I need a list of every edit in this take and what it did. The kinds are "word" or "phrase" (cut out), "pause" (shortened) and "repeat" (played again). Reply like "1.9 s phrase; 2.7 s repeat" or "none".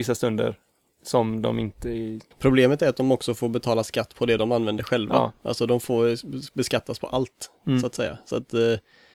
2.3 s pause